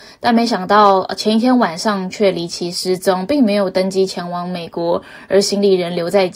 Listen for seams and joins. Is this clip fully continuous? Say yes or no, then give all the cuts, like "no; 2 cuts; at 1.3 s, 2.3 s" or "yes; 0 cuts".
yes; 0 cuts